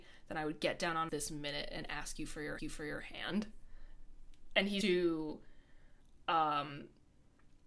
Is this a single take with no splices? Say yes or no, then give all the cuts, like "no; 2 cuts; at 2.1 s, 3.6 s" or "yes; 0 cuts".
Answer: no; 3 cuts; at 1.1 s, 2.6 s, 4.8 s